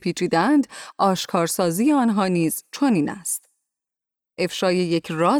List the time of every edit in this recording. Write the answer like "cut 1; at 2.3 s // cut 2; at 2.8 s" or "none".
none